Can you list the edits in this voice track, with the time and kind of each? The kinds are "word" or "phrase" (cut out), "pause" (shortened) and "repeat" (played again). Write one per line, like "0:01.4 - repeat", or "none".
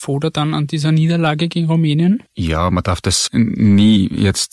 0:02.3 - pause
0:03.3 - word